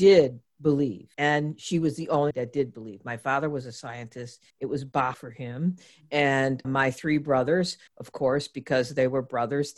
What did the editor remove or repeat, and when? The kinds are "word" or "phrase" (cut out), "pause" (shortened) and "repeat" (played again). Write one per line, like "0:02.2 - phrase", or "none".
0:01.1 - pause
0:02.3 - phrase
0:04.5 - pause
0:05.1 - word
0:06.6 - word
0:07.9 - pause